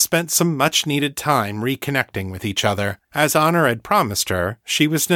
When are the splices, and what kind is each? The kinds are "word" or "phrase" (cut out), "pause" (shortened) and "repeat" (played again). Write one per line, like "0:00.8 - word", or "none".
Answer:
0:03.0 - pause